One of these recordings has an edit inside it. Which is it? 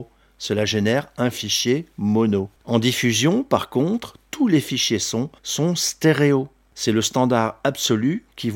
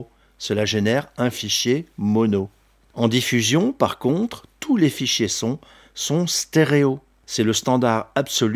first; 2 cuts; at 2.6 s, 5.4 s

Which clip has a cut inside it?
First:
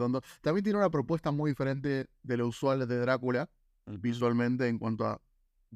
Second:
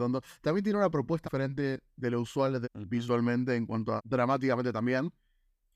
second; 3 cuts; at 1.2 s, 2.6 s, 4.0 s

